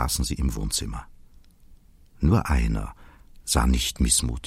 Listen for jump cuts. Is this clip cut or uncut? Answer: uncut